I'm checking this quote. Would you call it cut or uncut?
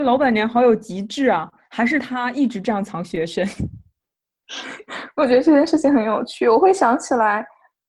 uncut